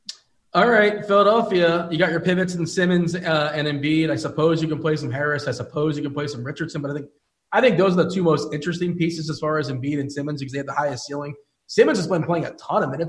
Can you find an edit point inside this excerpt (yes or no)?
no